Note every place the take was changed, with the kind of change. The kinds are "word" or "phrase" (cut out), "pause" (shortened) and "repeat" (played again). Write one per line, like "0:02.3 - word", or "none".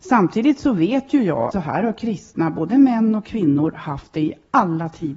0:01.5 - word